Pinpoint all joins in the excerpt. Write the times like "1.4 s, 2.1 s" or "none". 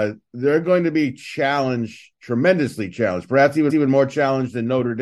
3.7 s